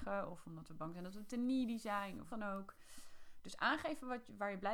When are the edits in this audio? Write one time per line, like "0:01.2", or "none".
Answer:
0:02.3